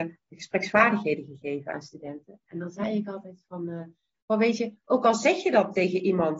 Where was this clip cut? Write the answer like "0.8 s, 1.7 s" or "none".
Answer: none